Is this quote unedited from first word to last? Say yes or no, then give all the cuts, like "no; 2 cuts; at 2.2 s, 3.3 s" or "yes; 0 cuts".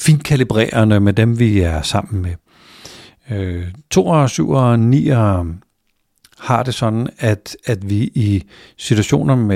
yes; 0 cuts